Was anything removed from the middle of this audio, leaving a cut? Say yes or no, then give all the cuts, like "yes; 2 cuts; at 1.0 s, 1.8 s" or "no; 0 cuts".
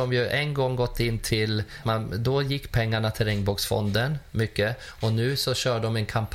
yes; 1 cut; at 1.8 s